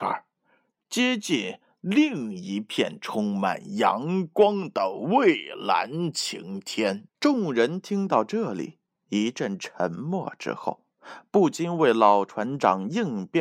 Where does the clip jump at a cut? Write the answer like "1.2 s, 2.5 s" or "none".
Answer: 7.1 s, 9.0 s

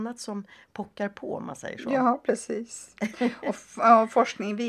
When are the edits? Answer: none

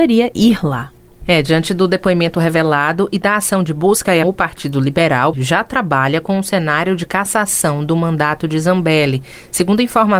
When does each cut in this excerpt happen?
4.2 s, 5.3 s

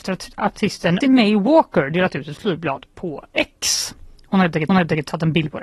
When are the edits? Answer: 1.0 s, 2.9 s, 4.7 s

